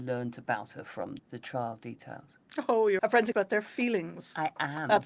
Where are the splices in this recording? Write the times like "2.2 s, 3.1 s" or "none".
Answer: 1.2 s, 3.0 s, 3.3 s